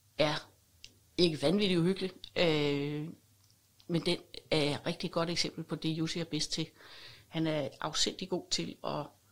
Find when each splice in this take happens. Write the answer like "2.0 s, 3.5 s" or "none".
none

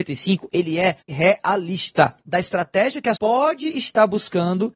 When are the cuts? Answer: 1.1 s, 2.2 s, 3.1 s

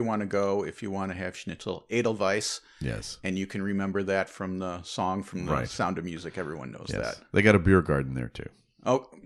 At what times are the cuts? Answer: none

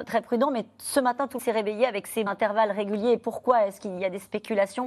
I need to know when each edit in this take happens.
1.4 s, 2.3 s

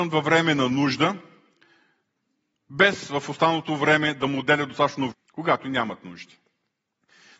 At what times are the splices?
5.1 s

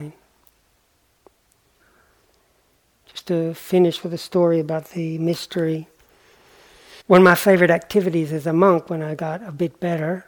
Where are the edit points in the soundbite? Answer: 7.0 s

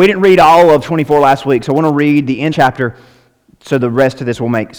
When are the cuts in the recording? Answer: 2.5 s

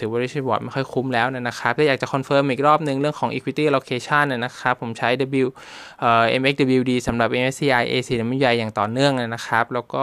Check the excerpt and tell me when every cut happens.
none

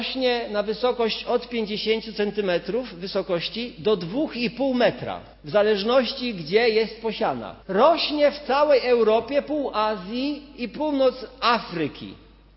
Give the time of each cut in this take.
5.3 s, 7.6 s

